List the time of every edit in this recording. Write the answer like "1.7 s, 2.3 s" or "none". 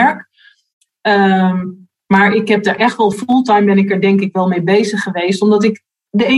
none